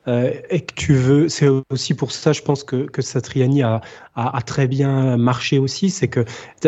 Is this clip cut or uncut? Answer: uncut